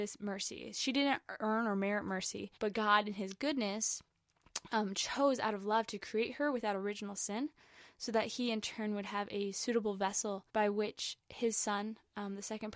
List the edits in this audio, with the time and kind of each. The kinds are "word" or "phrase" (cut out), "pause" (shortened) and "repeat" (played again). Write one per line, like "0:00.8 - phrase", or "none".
0:02.6 - pause
0:10.5 - pause